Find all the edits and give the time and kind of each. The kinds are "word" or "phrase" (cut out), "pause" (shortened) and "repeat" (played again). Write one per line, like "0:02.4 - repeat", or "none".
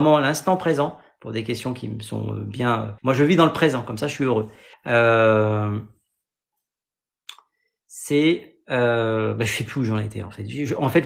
0:03.0 - pause
0:04.7 - pause